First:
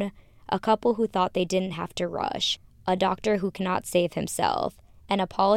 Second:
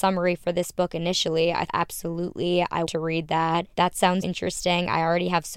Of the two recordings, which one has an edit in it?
second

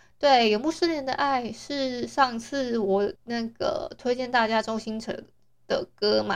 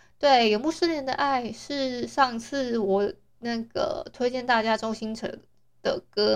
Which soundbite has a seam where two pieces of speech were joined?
first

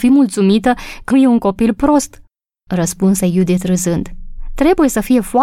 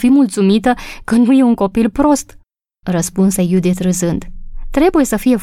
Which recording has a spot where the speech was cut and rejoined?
first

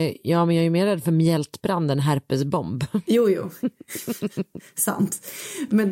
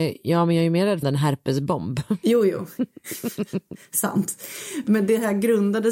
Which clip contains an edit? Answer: second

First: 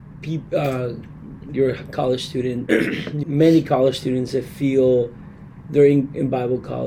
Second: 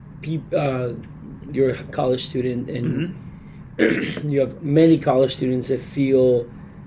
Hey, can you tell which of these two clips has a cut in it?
first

